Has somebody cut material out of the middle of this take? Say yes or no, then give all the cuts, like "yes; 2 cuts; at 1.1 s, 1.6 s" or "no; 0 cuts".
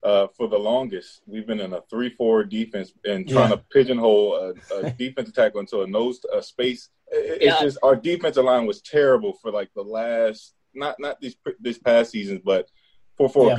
yes; 3 cuts; at 3.0 s, 7.0 s, 10.6 s